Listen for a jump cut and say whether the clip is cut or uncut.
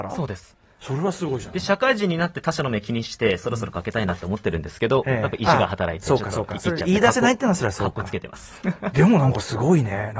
cut